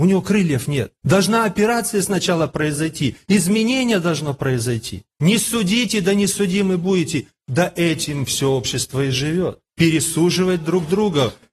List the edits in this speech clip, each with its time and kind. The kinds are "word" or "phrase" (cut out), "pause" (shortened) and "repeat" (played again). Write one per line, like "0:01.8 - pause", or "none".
0:01.0 - pause
0:05.1 - pause
0:09.7 - pause